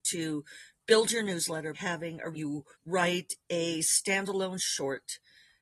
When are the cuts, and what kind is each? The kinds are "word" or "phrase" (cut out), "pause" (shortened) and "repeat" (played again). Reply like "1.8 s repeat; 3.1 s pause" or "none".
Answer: 1.7 s word; 2.3 s phrase; 2.7 s pause

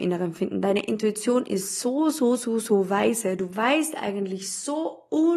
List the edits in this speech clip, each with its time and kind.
none

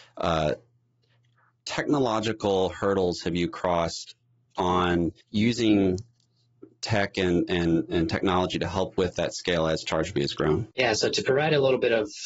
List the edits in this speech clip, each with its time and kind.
5.2 s pause; 10.7 s pause

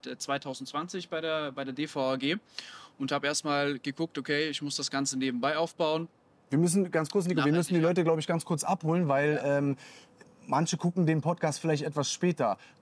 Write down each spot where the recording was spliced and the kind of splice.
none

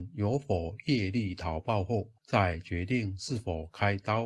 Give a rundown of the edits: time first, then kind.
2.2 s pause

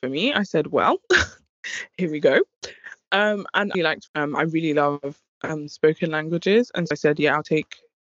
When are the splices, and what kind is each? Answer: 3.7 s word; 4.1 s word; 6.9 s word

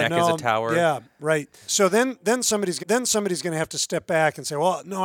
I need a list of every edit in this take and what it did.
2.8 s repeat

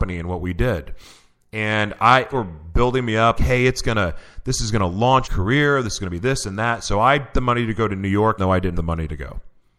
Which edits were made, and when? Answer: 2.3 s word; 3.3 s word; 5.2 s word; 7.3 s word; 8.4 s word; 8.7 s word

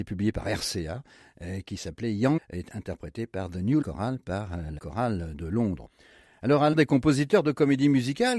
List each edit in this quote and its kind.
2.4 s phrase; 3.8 s word; 4.8 s word; 6.7 s word

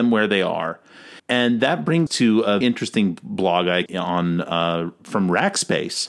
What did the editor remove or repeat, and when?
1.2 s pause; 2.1 s word; 2.6 s word; 3.9 s phrase

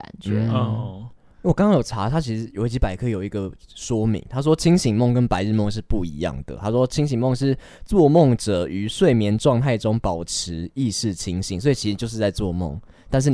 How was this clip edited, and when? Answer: 4.2 s word

